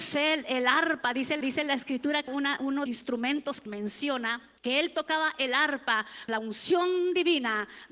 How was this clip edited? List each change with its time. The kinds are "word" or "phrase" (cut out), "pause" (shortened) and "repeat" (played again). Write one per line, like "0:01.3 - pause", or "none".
0:01.4 - repeat
0:02.3 - word
0:02.9 - phrase
0:03.7 - word
0:04.6 - pause
0:06.3 - word